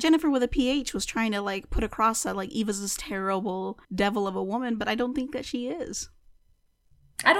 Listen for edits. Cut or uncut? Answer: cut